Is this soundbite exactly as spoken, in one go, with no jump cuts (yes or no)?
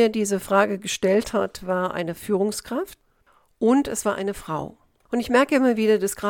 yes